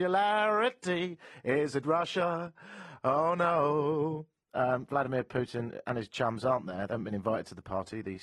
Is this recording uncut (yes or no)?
yes